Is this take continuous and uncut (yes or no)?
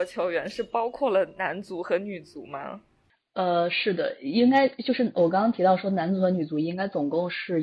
yes